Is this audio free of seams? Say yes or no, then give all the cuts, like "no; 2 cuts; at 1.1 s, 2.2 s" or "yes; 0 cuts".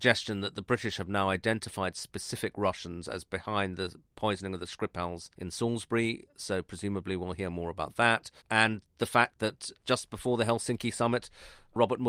no; 3 cuts; at 5.3 s, 8.4 s, 9.8 s